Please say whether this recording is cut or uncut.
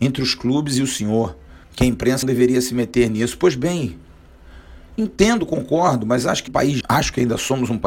cut